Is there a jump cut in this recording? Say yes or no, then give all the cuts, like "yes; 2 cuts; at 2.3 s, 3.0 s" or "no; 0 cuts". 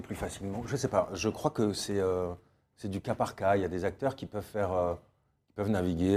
no; 0 cuts